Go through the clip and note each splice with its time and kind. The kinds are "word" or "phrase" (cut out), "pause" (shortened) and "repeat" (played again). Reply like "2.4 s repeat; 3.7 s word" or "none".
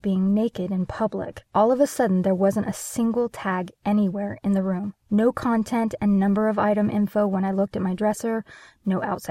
1.5 s pause; 5.0 s pause